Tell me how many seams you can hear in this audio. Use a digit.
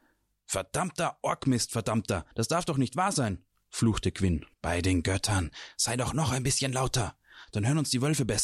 2